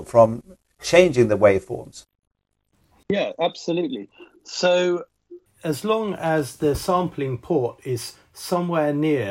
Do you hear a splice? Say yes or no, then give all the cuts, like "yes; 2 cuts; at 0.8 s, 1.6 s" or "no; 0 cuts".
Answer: no; 0 cuts